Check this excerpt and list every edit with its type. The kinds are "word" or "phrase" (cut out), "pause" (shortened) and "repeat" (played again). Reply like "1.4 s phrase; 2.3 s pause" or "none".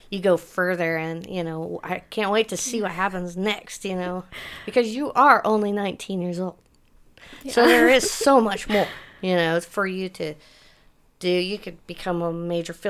none